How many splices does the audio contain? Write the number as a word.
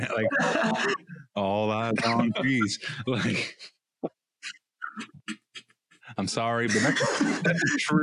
zero